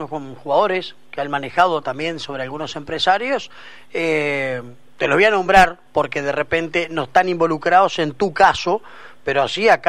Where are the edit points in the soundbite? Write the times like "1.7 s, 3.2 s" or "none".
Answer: 5.9 s